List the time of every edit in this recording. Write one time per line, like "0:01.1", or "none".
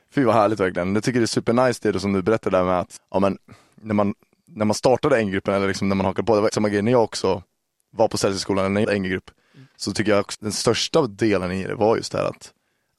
0:03.0
0:06.5
0:08.8
0:10.3